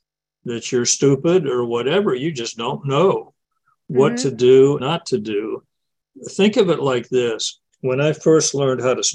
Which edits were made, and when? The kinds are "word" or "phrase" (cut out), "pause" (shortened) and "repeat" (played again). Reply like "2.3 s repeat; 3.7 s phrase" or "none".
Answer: 4.8 s word; 7.7 s word